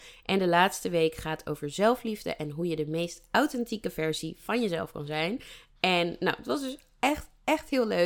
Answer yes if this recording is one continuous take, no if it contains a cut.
yes